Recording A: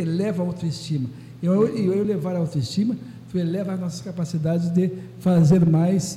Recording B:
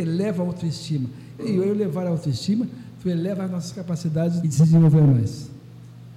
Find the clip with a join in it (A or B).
B